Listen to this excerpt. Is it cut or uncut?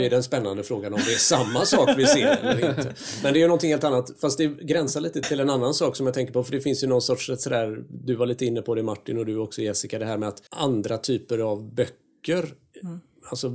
cut